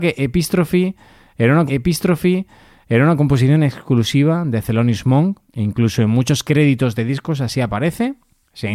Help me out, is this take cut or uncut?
cut